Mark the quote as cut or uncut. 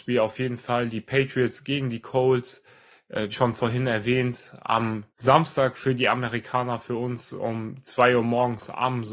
cut